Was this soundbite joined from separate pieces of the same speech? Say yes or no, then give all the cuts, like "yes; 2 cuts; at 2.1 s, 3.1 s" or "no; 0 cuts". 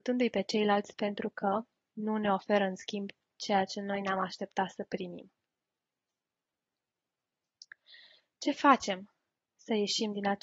no; 0 cuts